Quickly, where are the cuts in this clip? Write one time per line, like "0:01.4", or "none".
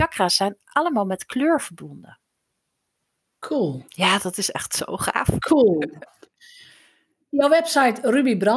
none